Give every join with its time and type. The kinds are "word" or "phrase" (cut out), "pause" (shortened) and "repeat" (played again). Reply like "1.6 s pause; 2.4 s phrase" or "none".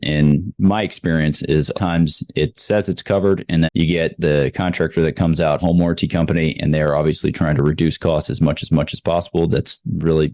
1.7 s phrase; 3.6 s word; 5.6 s phrase; 8.7 s repeat